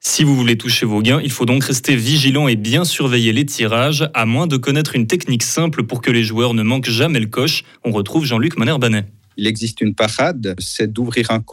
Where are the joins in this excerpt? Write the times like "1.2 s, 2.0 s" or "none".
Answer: none